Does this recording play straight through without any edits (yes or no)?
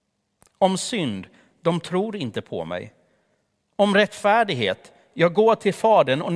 yes